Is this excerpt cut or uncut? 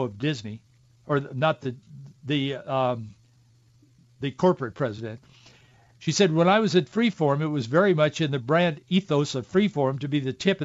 cut